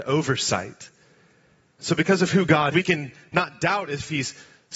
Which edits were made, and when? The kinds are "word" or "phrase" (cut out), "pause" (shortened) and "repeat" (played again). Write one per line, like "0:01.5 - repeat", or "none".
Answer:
0:02.7 - word

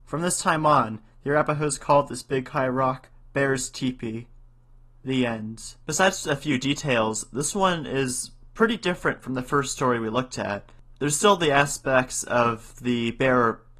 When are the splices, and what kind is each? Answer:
0:05.8 - pause

